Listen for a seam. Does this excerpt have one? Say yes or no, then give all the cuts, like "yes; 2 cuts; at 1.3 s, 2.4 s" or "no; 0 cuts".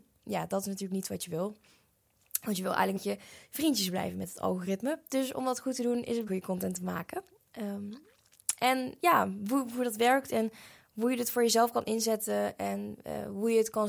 yes; 2 cuts; at 3.0 s, 6.3 s